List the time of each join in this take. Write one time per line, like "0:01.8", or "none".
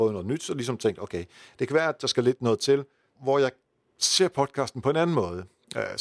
0:03.1